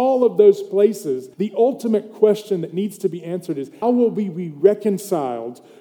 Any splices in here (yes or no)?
yes